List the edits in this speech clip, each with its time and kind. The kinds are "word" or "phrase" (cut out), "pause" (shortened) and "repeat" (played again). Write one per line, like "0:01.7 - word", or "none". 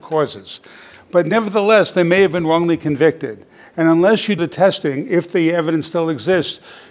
0:04.4 - word

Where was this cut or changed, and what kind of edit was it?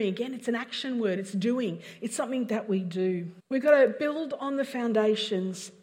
0:03.4 - pause

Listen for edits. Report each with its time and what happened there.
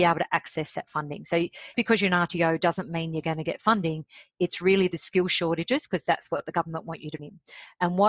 0:01.7 - word
0:07.2 - word

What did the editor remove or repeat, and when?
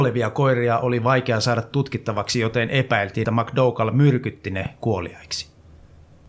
0:03.2 - word

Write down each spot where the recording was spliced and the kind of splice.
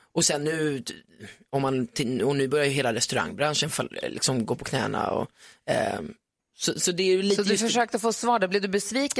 none

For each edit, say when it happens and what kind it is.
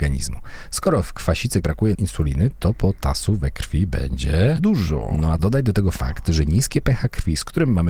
0:01.6 - word
0:01.9 - word
0:04.6 - word
0:05.4 - word

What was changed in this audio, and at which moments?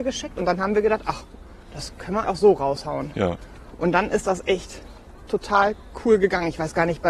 0:01.6 - pause
0:02.2 - word

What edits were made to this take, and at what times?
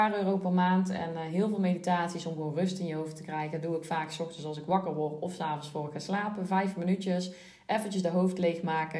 none

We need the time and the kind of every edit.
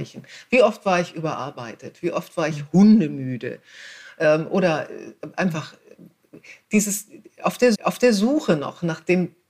0:07.7 - repeat

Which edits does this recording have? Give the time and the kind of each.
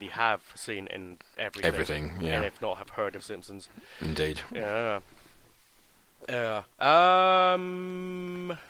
0:03.2 - word
0:06.7 - pause

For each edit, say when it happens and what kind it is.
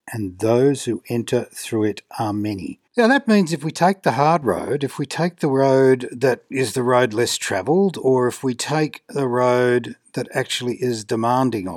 0:02.9 - pause

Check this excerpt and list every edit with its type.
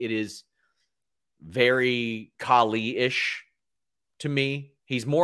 none

